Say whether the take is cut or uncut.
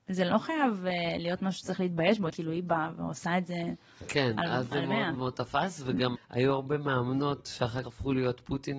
cut